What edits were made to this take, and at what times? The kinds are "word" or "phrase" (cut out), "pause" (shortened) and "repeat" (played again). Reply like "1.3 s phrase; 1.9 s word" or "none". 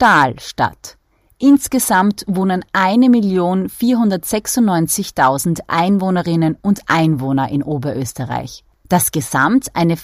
none